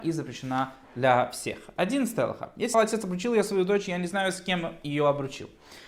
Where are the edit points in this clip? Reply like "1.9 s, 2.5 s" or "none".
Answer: 2.7 s